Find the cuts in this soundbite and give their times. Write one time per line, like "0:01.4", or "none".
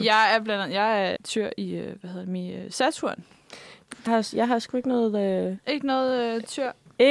0:01.2
0:04.1